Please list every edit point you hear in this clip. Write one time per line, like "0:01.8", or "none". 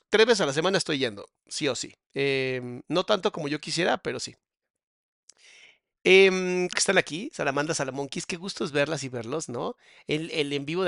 0:02.0
0:06.7

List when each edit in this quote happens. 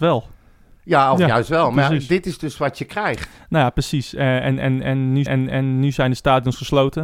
0:05.3

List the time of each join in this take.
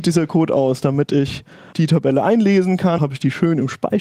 0:01.7
0:03.0

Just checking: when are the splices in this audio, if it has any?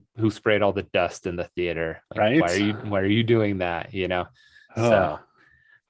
none

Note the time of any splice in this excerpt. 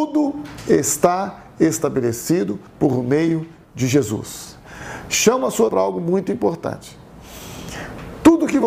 0:02.7
0:05.7

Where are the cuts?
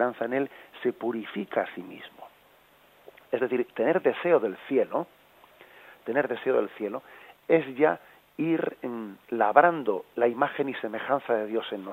0:09.2

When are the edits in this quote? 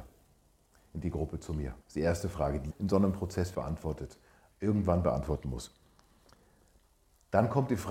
0:01.0
0:01.8
0:02.7
0:03.5

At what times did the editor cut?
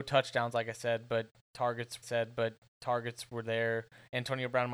0:02.0

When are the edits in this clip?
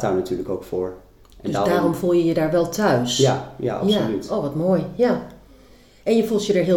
none

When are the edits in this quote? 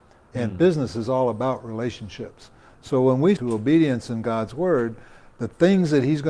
0:03.4

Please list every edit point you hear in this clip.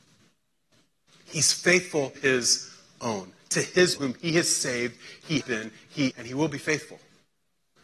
0:02.1
0:03.9
0:05.4
0:06.1

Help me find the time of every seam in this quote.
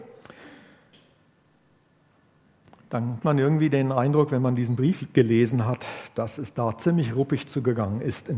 0:03.2

